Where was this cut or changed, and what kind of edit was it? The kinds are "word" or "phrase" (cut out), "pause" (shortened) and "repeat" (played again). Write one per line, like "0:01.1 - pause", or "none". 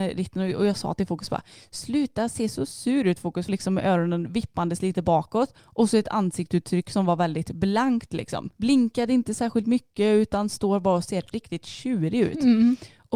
0:03.5 - phrase
0:05.6 - pause
0:08.5 - pause